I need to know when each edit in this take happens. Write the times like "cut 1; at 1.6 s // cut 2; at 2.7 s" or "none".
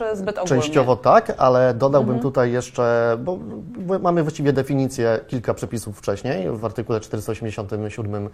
none